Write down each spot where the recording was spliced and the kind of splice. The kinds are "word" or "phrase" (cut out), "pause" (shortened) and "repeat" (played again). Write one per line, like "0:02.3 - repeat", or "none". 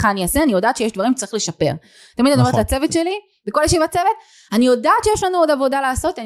none

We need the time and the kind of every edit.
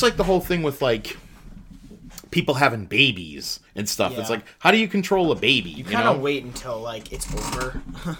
0:03.7 - pause

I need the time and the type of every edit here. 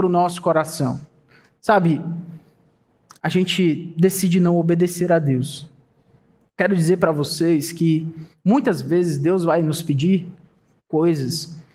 none

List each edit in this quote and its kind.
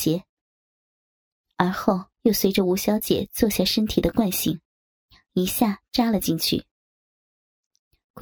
0:02.1 - pause

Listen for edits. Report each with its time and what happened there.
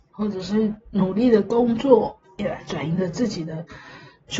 0:02.2 - pause

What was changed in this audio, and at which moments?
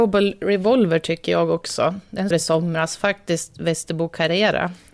0:02.3 - phrase

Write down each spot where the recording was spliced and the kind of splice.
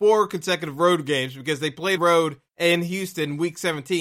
0:02.0 - phrase
0:02.5 - pause

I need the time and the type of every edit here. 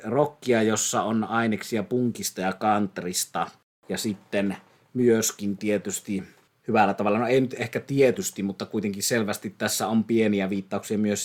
none

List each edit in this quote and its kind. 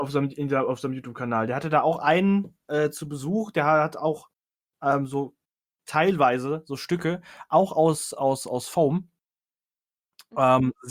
none

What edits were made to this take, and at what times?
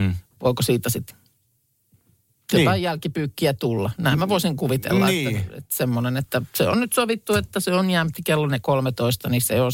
0:01.1 - word

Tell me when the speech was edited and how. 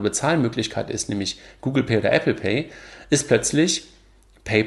none

